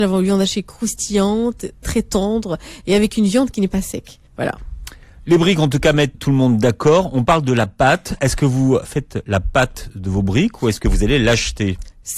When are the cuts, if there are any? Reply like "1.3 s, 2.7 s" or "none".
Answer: 1.8 s, 4.3 s, 6.1 s